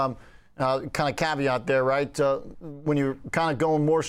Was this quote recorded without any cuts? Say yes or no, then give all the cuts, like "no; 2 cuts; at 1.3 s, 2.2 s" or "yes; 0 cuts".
yes; 0 cuts